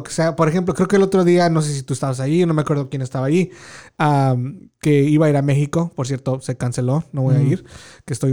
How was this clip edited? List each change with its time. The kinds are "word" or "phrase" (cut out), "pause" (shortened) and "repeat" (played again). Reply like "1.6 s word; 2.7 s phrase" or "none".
none